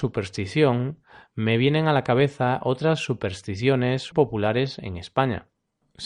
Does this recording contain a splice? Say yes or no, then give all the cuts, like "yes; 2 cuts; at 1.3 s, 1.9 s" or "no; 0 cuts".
yes; 1 cut; at 4.1 s